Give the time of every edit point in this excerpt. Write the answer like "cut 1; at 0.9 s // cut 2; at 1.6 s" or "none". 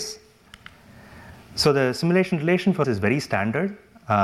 cut 1; at 2.8 s